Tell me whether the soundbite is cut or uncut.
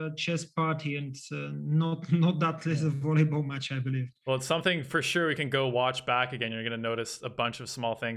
uncut